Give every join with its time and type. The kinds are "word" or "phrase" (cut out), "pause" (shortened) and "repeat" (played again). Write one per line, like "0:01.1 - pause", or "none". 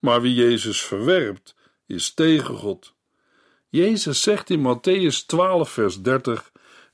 none